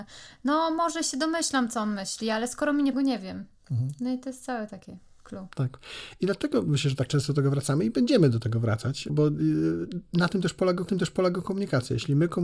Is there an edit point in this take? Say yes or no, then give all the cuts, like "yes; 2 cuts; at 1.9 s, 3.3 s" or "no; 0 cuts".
yes; 5 cuts; at 2.9 s, 3.6 s, 5.5 s, 9.1 s, 10.9 s